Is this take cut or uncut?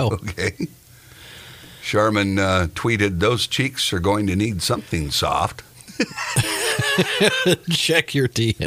uncut